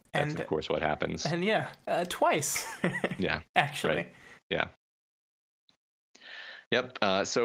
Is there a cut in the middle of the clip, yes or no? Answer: no